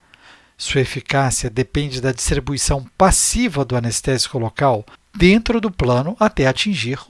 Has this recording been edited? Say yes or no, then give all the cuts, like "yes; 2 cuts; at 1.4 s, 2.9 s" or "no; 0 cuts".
yes; 1 cut; at 4.9 s